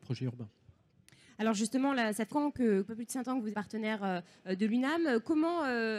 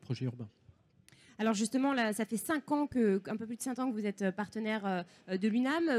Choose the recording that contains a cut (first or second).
first